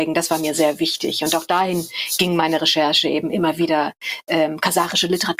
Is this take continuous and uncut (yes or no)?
yes